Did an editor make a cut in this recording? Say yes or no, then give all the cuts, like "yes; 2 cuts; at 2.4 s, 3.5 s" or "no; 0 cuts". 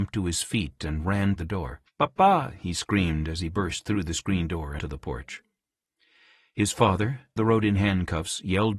yes; 4 cuts; at 1.4 s, 1.9 s, 4.8 s, 7.4 s